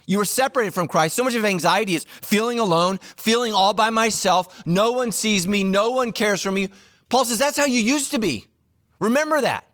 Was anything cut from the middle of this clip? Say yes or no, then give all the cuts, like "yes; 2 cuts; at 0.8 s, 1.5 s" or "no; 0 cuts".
no; 0 cuts